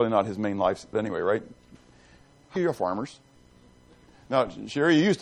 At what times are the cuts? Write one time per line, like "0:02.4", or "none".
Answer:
0:00.9
0:02.6